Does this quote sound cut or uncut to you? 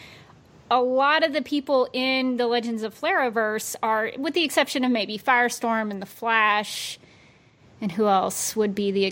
uncut